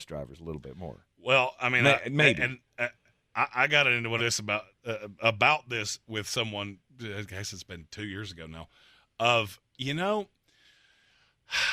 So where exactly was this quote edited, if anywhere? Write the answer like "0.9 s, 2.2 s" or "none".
3.0 s, 4.2 s